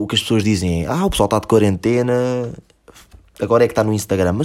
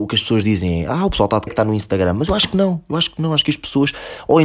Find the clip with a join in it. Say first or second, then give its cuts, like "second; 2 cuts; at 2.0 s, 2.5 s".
second; 1 cut; at 1.5 s